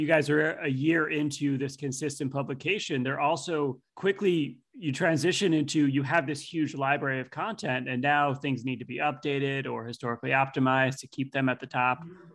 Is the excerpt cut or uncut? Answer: cut